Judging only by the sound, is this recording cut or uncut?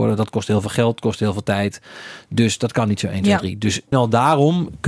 cut